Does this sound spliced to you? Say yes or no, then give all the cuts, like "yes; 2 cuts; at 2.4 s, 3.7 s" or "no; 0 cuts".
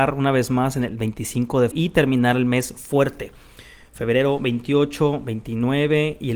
yes; 1 cut; at 1.7 s